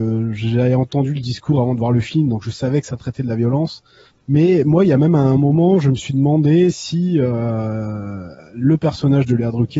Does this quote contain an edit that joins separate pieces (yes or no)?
yes